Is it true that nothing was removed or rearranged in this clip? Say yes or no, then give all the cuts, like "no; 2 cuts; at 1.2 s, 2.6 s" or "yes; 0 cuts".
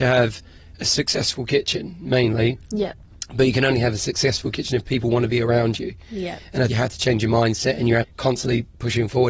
no; 2 cuts; at 6.7 s, 8.0 s